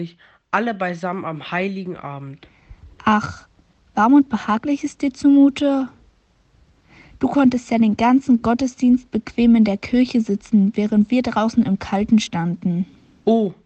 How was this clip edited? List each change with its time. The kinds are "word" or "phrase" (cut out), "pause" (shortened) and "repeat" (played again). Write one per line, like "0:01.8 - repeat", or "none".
none